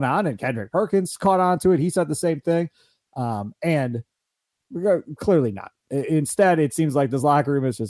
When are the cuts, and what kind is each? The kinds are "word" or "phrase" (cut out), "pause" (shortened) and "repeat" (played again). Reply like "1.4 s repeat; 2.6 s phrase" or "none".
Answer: none